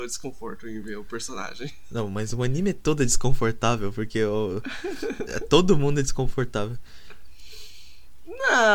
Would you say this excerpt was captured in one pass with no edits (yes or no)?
yes